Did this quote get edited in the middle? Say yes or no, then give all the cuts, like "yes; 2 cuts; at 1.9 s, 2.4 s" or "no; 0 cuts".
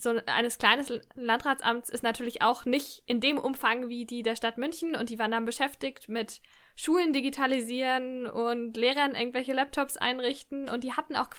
no; 0 cuts